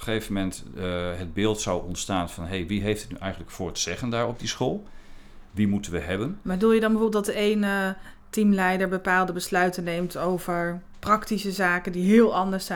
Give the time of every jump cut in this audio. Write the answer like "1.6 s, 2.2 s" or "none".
none